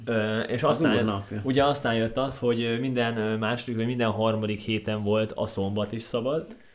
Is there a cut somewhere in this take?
no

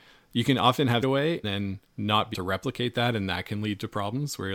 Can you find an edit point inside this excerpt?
yes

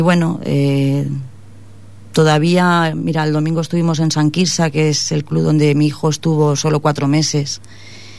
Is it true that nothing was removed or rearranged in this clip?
yes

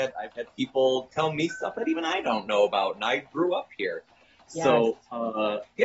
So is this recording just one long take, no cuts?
yes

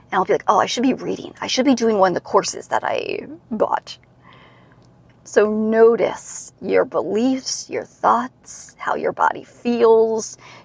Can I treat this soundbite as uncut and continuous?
yes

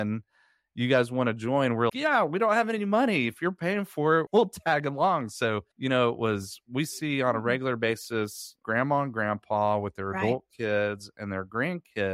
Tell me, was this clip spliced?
yes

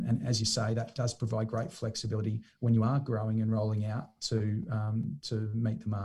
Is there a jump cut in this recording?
no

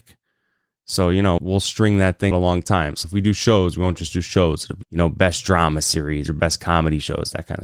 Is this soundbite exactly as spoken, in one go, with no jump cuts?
no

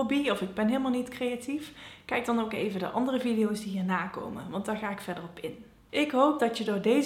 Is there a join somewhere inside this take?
no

